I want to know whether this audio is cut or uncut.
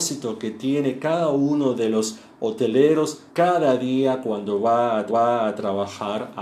cut